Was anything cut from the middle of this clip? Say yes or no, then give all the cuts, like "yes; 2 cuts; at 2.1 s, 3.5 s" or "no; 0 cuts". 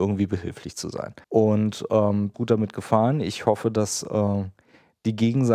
yes; 2 cuts; at 1.2 s, 2.3 s